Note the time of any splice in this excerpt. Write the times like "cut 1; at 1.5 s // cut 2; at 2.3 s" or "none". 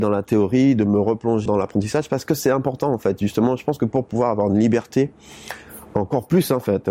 cut 1; at 1.5 s